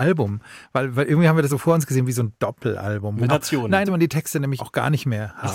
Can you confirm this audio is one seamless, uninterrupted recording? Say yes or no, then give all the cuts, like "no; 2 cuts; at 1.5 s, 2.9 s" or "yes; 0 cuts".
no; 4 cuts; at 1.5 s, 3.3 s, 3.9 s, 4.6 s